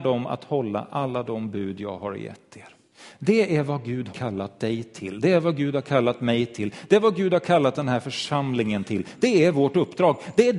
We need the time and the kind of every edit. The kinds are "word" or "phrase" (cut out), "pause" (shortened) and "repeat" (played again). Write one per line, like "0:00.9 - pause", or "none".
0:04.1 - word